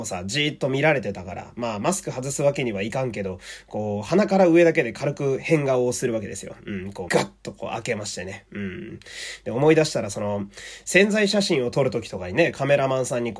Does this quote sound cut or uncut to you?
cut